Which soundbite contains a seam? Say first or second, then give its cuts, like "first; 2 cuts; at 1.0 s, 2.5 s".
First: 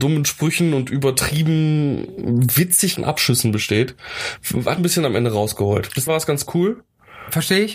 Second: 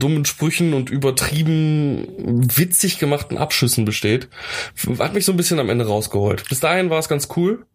first; 3 cuts; at 3.0 s, 4.8 s, 6.1 s